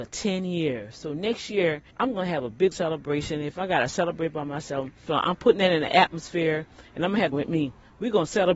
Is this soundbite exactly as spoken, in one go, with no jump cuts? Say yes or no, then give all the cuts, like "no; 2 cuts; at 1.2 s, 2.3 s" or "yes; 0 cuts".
no; 4 cuts; at 1.9 s, 2.7 s, 5.1 s, 7.3 s